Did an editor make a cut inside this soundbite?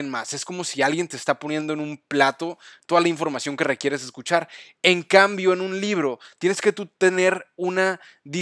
no; 0 cuts

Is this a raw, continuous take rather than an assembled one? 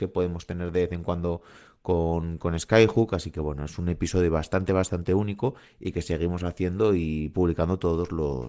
yes; 0 cuts

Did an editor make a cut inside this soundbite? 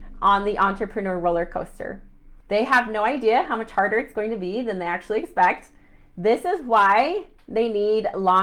yes; 1 cut; at 2.4 s

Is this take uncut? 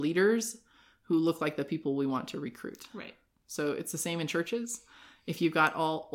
yes; 0 cuts

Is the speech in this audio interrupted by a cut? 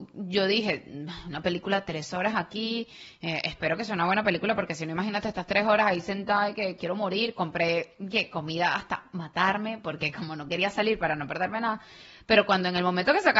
no; 0 cuts

